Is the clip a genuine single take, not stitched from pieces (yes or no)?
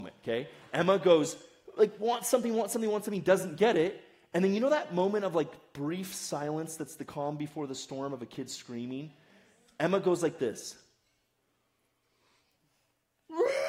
yes